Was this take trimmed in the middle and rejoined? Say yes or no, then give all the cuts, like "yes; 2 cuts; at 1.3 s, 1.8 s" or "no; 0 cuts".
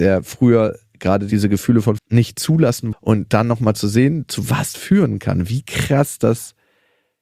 yes; 3 cuts; at 2.0 s, 2.9 s, 4.7 s